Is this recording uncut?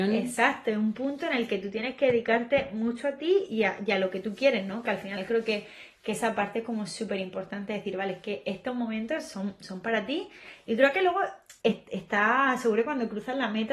no; 1 cut; at 11.6 s

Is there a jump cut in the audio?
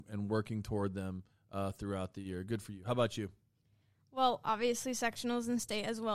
no; 0 cuts

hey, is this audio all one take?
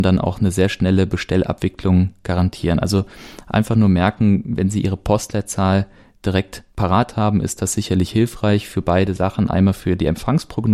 no; 1 cut; at 6.7 s

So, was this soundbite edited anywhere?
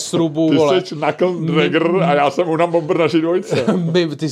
no; 0 cuts

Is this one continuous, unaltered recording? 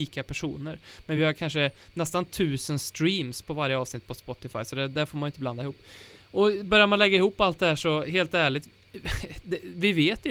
yes; 0 cuts

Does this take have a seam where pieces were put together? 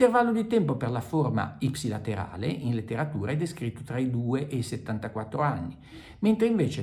no; 0 cuts

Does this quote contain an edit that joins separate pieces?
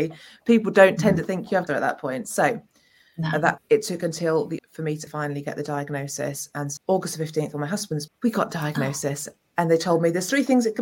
yes; 6 cuts; at 1.7 s, 3.6 s, 4.6 s, 5.1 s, 6.8 s, 8.1 s

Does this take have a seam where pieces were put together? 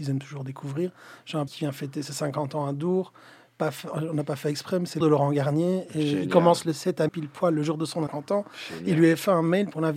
yes; 4 cuts; at 1.5 s, 5.0 s, 7.1 s, 8.1 s

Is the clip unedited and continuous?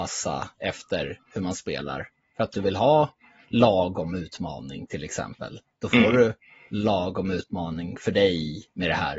yes; 0 cuts

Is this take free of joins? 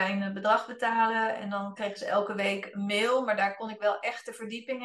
yes; 0 cuts

